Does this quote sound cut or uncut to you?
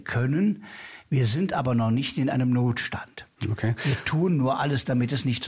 uncut